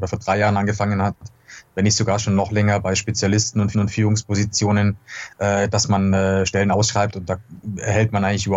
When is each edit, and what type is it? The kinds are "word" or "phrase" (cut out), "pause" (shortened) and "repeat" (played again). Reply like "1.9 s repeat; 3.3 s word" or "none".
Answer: 3.7 s repeat